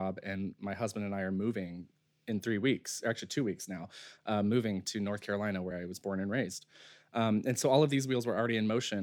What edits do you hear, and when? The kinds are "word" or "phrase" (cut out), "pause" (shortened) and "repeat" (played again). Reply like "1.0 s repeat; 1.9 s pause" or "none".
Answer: none